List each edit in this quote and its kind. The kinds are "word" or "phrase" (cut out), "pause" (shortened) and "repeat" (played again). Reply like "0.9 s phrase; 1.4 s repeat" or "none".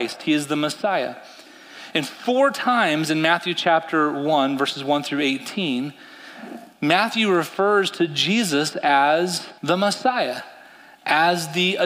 9.6 s pause